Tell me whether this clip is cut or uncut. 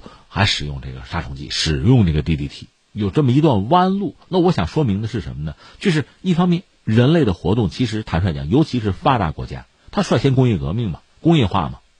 uncut